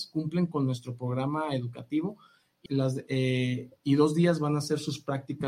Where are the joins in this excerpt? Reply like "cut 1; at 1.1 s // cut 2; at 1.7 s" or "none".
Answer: cut 1; at 2.7 s